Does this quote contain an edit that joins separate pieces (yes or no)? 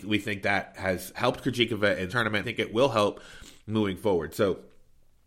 yes